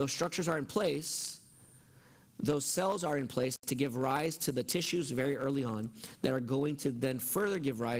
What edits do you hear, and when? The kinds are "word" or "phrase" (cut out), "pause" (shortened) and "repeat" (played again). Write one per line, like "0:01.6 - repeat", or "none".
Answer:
none